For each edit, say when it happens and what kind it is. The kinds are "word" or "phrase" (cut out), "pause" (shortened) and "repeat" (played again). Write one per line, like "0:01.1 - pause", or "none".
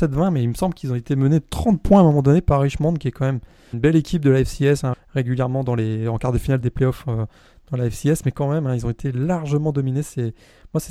0:03.7 - word
0:04.9 - word
0:06.6 - word

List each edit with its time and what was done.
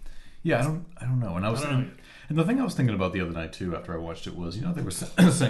none

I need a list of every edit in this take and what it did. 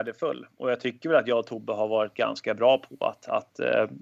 none

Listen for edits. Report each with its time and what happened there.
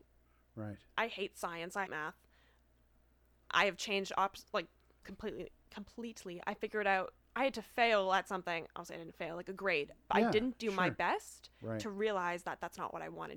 0:01.9 - word
0:05.0 - word
0:07.2 - pause

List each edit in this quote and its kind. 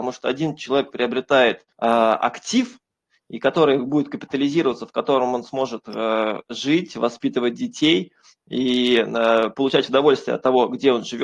0:01.7 - pause

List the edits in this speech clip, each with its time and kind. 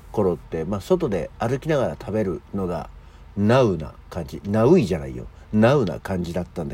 0:01.3 - pause

